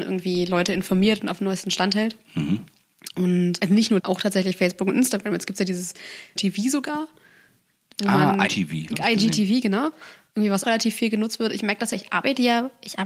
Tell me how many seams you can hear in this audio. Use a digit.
6